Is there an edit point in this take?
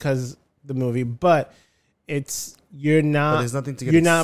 no; 0 cuts

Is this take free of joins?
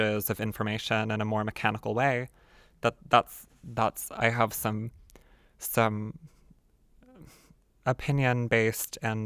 yes; 0 cuts

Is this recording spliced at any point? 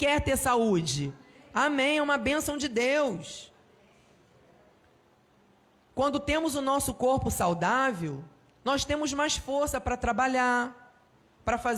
no; 0 cuts

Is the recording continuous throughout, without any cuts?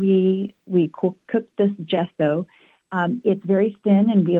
yes; 0 cuts

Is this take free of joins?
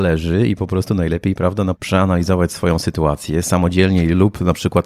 no; 1 cut; at 1.7 s

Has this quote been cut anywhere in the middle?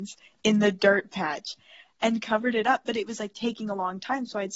no; 0 cuts

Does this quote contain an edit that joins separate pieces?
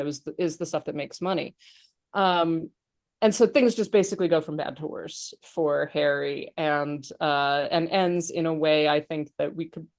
no; 0 cuts

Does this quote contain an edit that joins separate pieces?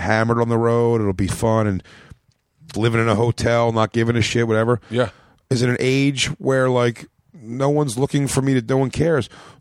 yes; 2 cuts; at 1.3 s, 2.7 s

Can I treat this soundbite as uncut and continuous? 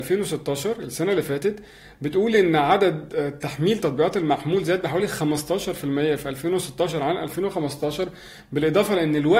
yes; 0 cuts

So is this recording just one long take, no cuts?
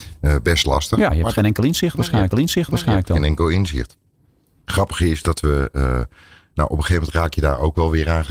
no; 1 cut; at 2.3 s

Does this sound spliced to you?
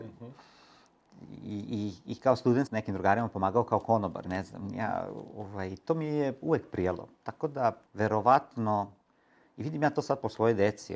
yes; 3 cuts; at 2.7 s, 4.2 s, 7.9 s

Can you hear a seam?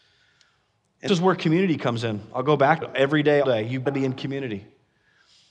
yes; 4 cuts; at 1.1 s, 2.8 s, 3.4 s, 3.9 s

